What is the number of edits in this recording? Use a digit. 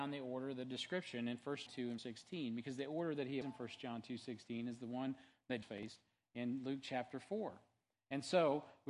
4